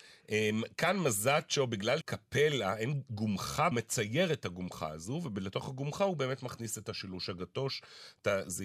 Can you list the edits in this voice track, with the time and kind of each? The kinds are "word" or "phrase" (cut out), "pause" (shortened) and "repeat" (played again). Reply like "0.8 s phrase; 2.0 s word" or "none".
2.0 s word; 3.7 s phrase

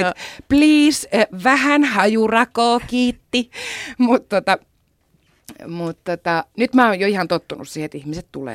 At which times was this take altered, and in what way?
6.5 s pause

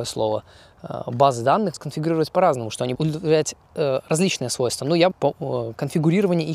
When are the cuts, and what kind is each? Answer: 1.7 s phrase; 3.0 s word; 5.1 s phrase

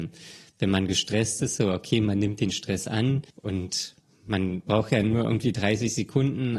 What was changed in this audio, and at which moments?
3.3 s pause

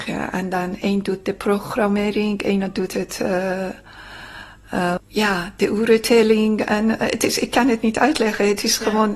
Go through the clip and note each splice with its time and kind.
5.0 s word

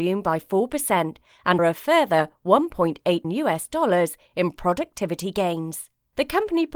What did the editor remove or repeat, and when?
1.6 s word; 3.2 s word

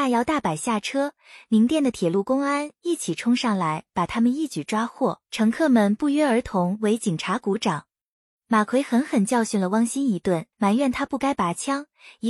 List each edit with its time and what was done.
5.2 s pause; 10.5 s pause

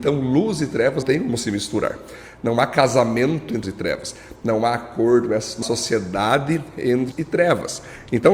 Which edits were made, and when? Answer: 1.0 s word; 3.6 s word; 5.6 s word; 7.1 s word

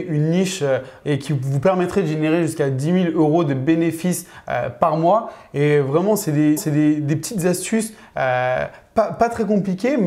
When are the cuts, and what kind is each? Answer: 1.0 s word; 6.6 s repeat

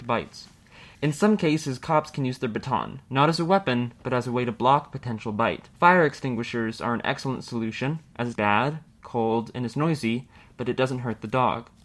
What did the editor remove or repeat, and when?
0.9 s pause; 8.3 s word

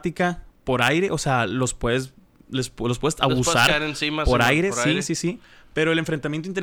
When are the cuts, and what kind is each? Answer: none

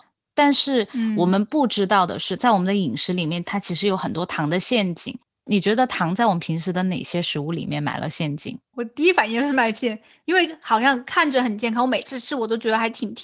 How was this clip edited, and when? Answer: none

